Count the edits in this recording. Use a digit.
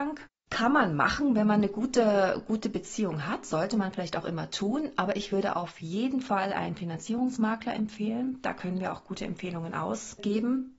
0